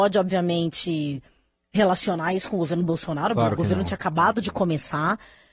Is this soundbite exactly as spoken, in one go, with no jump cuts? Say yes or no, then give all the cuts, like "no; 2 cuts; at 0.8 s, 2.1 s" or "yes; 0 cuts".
yes; 0 cuts